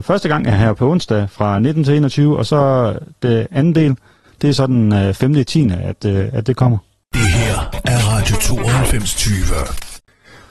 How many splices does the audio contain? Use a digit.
0